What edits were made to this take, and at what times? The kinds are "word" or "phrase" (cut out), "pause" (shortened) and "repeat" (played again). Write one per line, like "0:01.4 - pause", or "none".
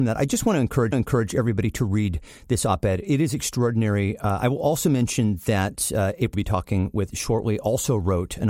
0:00.9 - repeat
0:06.3 - phrase